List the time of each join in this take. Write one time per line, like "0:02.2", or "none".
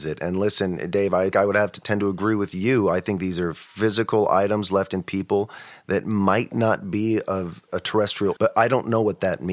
0:01.3
0:07.7
0:08.4

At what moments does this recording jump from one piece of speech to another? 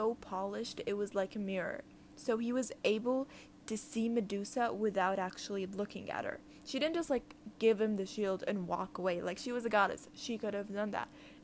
none

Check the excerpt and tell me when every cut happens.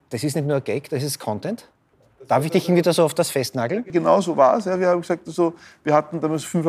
none

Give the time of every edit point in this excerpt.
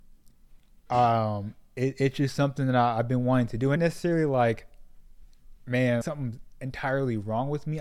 0:03.8
0:06.0

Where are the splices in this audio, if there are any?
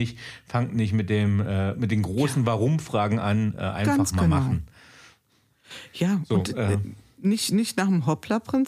none

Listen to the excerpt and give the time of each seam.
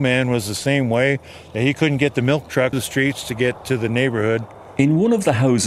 0:02.7

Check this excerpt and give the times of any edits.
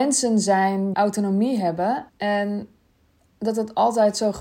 0:00.9
0:02.1

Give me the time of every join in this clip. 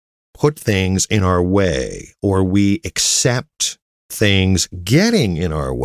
none

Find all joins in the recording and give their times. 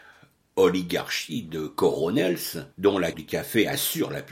0:02.7
0:03.1

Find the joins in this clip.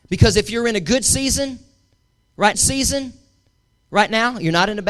0:02.5

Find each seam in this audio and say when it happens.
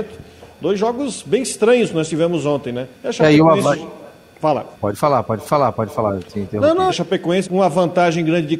0:02.9
0:04.7
0:05.4
0:06.9
0:07.4

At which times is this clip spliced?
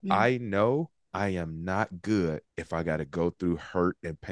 0:02.5

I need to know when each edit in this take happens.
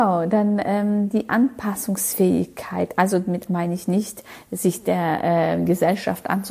0:03.5

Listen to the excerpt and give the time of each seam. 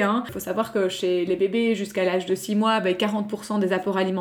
none

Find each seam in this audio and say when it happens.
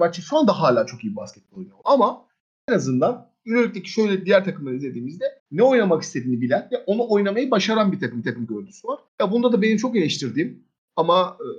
0:05.4
0:08.2
0:09.1

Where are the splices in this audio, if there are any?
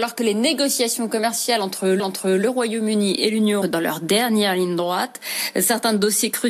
0:02.0
0:03.6

